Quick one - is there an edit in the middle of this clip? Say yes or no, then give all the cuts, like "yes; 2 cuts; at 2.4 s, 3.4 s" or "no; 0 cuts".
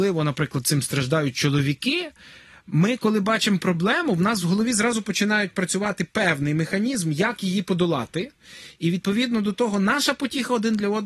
no; 0 cuts